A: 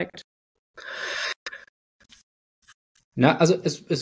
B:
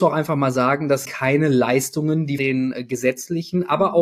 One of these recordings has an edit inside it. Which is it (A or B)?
B